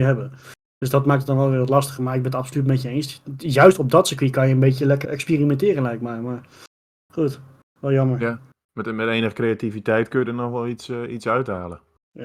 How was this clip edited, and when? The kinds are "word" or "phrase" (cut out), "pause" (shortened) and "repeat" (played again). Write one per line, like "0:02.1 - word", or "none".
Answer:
0:05.0 - word